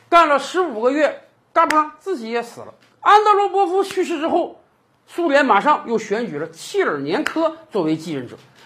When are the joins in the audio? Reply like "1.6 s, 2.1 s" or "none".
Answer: none